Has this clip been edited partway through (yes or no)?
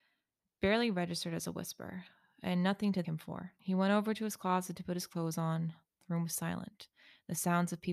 yes